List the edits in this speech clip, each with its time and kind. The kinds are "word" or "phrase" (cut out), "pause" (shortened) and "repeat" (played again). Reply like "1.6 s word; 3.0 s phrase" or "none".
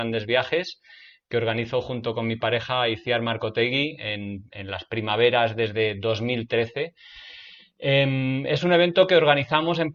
none